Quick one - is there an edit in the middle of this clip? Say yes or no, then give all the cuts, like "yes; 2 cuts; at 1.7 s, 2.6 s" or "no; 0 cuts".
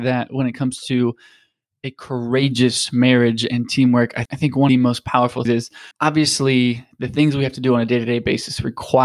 yes; 4 cuts; at 4.3 s, 4.7 s, 5.4 s, 5.9 s